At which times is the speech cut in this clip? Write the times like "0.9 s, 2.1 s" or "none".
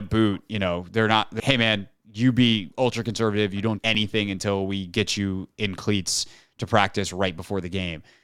1.4 s, 3.8 s